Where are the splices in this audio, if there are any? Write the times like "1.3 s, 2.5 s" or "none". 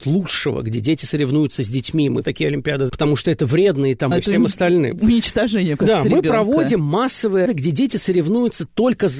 2.2 s, 2.9 s, 4.1 s, 5.8 s, 7.5 s